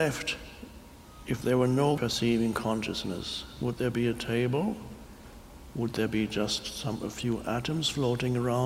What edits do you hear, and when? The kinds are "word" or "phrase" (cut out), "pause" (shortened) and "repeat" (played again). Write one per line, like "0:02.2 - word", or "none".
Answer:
none